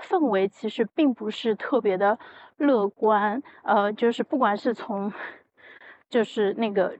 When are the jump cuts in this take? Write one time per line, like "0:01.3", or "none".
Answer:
none